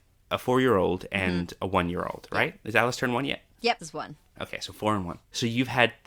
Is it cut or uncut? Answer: cut